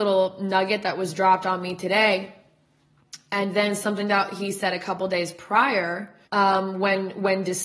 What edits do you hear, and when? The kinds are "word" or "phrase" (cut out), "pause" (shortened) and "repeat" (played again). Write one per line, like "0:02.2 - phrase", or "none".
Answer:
0:06.2 - pause